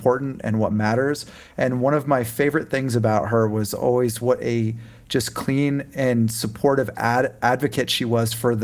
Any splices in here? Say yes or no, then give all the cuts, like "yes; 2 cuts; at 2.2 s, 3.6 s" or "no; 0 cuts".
no; 0 cuts